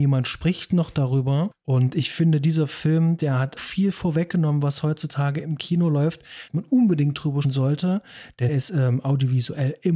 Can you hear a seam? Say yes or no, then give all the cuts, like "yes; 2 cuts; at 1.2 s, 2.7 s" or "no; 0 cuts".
yes; 4 cuts; at 3.6 s, 6.5 s, 7.4 s, 8.5 s